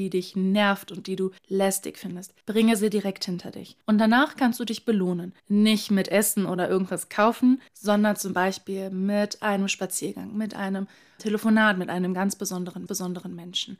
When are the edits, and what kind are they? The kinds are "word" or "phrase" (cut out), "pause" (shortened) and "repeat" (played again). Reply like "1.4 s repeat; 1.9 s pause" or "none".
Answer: 1.4 s pause; 2.4 s pause; 3.8 s pause; 5.4 s pause; 7.7 s pause; 11.2 s word; 12.9 s repeat